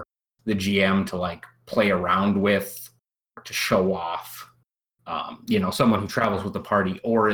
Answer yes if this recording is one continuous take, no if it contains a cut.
yes